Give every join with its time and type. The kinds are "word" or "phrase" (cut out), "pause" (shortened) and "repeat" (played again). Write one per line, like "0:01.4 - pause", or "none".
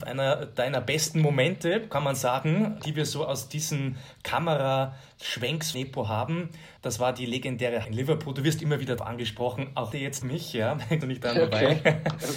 0:02.8 - word
0:05.7 - word
0:06.8 - word
0:07.8 - word
0:09.0 - word
0:09.9 - word
0:10.2 - word
0:11.0 - word

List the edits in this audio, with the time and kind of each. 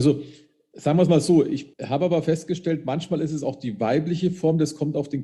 0:01.7 - pause

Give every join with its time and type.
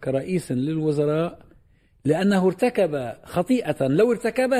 none

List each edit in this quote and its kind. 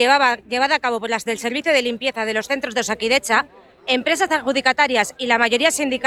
0:01.3 - word

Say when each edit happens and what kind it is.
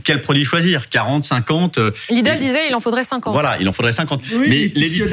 none

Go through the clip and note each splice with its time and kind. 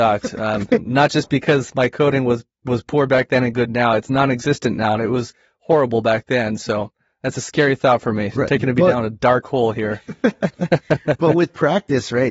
none

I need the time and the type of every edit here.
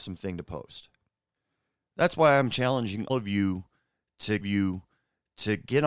0:01.2 - pause
0:03.1 - word
0:04.4 - repeat

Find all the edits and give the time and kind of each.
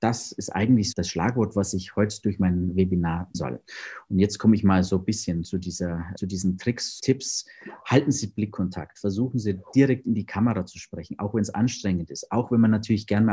0:00.9 - word
0:03.3 - word
0:06.2 - word
0:07.0 - word

